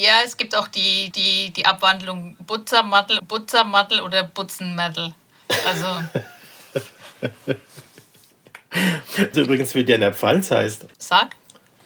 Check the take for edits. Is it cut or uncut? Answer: cut